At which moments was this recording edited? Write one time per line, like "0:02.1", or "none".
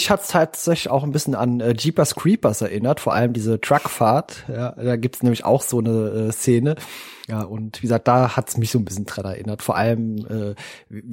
0:07.2